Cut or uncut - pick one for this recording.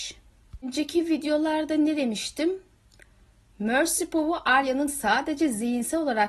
uncut